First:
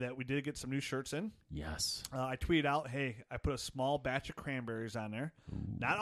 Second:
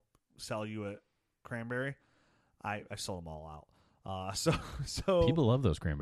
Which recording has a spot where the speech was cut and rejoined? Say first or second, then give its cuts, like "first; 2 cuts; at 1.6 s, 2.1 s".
first; 1 cut; at 1.4 s